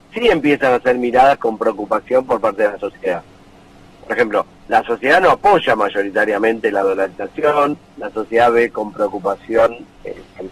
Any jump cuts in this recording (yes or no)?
yes